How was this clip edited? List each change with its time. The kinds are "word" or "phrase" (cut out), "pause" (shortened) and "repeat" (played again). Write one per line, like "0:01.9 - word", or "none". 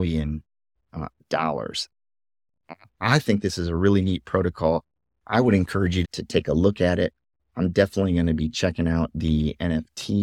0:06.0 - word